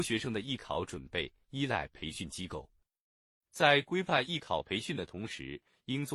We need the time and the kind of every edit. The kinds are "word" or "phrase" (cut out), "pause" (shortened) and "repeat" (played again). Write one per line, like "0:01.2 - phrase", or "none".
none